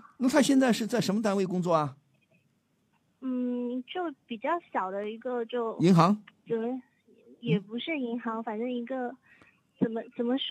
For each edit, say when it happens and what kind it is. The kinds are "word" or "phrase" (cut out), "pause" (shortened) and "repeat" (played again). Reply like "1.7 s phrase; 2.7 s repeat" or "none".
none